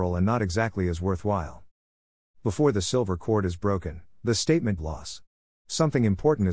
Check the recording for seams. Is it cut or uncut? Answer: cut